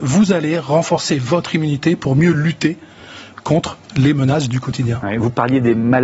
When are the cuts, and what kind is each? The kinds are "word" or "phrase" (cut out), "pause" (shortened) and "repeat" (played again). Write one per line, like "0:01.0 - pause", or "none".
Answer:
none